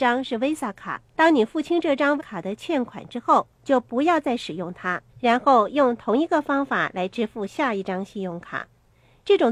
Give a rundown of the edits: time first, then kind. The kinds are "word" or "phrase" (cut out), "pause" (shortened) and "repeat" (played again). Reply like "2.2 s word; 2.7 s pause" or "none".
1.1 s pause; 2.2 s word; 3.6 s pause; 5.1 s pause